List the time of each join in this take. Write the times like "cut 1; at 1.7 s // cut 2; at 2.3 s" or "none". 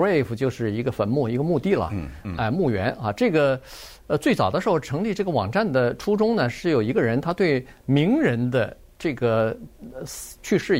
cut 1; at 2.2 s